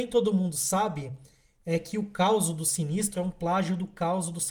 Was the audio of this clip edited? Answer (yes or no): no